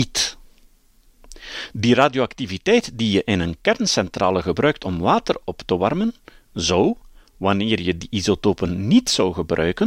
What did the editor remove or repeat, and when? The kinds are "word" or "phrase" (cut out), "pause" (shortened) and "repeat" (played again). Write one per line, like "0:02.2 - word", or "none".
none